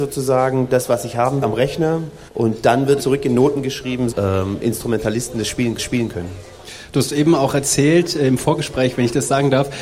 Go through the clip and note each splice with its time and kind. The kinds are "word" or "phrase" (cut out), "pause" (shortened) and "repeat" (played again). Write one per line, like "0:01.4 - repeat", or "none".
0:01.4 - word
0:02.3 - pause
0:03.0 - phrase
0:04.1 - phrase
0:05.8 - repeat